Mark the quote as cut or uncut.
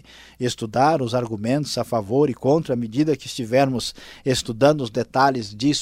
uncut